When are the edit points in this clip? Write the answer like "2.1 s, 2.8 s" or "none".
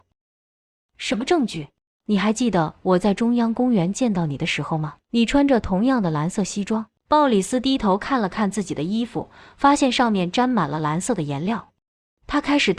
1.9 s, 5.0 s, 7.0 s